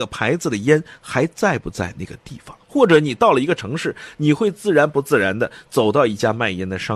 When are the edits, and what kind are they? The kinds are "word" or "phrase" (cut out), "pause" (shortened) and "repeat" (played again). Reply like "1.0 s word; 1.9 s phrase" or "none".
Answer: 2.6 s pause